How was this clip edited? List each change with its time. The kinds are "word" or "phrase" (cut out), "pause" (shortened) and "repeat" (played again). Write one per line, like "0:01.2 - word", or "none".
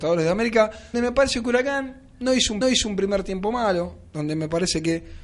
0:00.9 - word
0:02.6 - repeat